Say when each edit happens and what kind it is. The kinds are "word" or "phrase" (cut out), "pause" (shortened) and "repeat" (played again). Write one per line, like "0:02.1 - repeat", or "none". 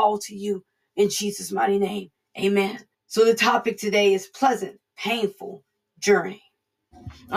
0:02.9 - pause